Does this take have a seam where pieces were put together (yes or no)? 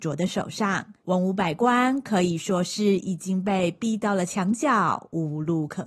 yes